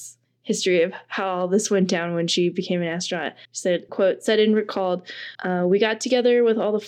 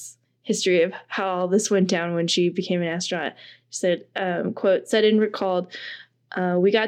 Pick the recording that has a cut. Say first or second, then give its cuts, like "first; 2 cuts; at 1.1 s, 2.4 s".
first; 3 cuts; at 3.4 s, 3.9 s, 5.3 s